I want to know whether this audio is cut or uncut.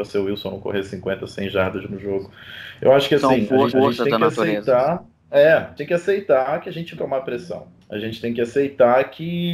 cut